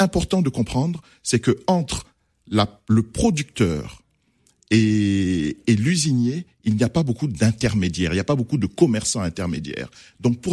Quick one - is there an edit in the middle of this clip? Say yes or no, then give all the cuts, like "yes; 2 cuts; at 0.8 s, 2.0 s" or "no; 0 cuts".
no; 0 cuts